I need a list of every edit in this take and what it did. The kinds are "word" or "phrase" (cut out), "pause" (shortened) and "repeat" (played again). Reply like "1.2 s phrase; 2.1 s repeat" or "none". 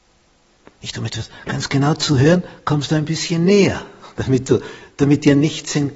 none